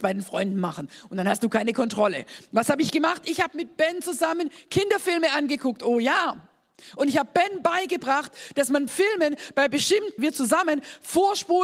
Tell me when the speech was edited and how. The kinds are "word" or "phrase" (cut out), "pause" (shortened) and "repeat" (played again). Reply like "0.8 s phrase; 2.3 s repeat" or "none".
8.9 s word; 10.2 s phrase